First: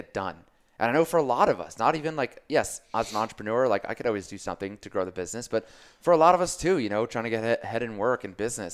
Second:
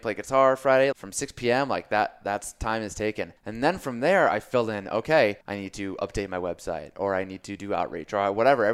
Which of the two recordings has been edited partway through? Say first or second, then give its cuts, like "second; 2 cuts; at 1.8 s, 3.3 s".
second; 3 cuts; at 0.9 s, 3.4 s, 5.4 s